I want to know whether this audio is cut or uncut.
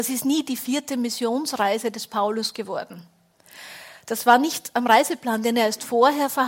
uncut